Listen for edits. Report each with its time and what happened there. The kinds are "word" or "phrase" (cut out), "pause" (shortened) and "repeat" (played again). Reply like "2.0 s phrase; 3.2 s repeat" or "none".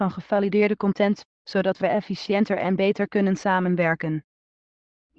none